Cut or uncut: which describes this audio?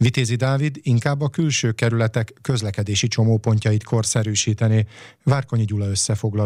uncut